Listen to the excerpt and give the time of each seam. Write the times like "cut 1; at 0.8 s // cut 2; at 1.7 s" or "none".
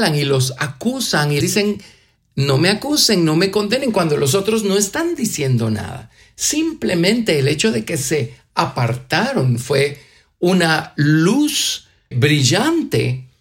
cut 1; at 1.4 s // cut 2; at 12.1 s